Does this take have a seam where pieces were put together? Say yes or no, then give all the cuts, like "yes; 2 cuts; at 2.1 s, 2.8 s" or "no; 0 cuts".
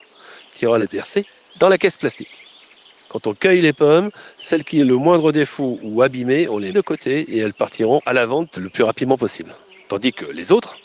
yes; 1 cut; at 6.7 s